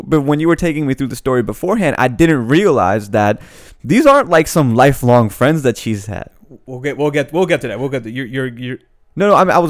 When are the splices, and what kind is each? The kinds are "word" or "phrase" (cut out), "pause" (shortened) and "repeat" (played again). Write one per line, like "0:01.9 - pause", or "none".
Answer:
none